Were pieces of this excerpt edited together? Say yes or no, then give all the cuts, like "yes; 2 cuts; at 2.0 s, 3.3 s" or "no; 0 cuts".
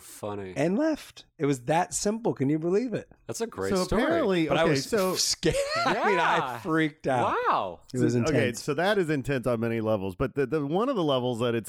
yes; 1 cut; at 3.2 s